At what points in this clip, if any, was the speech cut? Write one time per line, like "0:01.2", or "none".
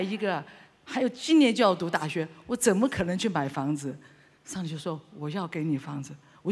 none